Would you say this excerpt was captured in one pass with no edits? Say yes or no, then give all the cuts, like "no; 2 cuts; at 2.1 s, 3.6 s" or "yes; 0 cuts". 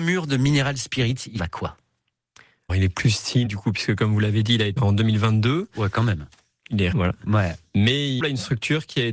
no; 6 cuts; at 1.4 s, 2.7 s, 3.5 s, 4.8 s, 6.9 s, 8.2 s